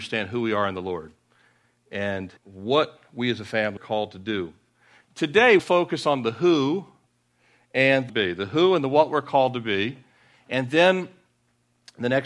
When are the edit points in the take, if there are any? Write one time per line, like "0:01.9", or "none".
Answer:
0:02.4
0:03.8
0:05.6
0:08.1